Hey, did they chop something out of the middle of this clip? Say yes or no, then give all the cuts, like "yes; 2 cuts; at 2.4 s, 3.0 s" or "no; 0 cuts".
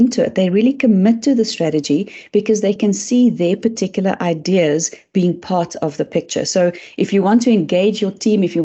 no; 0 cuts